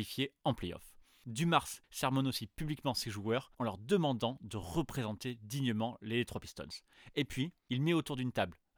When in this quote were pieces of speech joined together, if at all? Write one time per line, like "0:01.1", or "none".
0:01.8
0:03.5
0:07.6

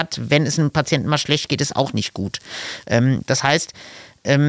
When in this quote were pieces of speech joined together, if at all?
none

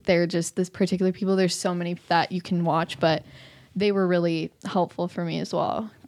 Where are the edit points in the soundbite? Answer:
0:02.0
0:04.6

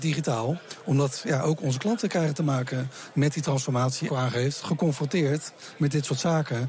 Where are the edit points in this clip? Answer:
0:04.1

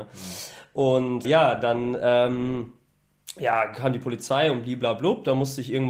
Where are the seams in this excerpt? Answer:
0:01.2

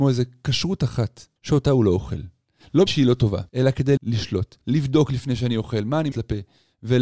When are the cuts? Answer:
0:01.4
0:02.9
0:03.5
0:04.0
0:04.6
0:06.1

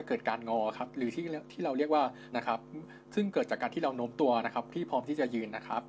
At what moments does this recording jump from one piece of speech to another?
0:02.3
0:03.0

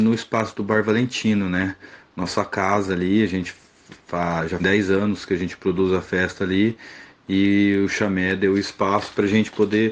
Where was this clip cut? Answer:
0:04.6

